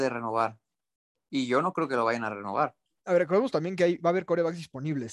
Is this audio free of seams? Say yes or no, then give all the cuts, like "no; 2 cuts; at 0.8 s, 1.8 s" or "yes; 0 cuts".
yes; 0 cuts